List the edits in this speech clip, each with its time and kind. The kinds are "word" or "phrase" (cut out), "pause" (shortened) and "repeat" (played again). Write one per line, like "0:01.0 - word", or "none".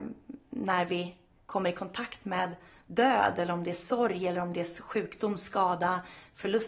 none